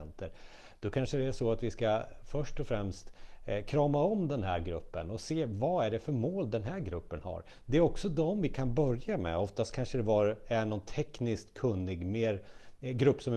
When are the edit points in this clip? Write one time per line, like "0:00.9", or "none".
none